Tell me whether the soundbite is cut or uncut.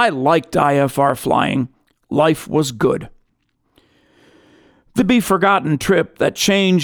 cut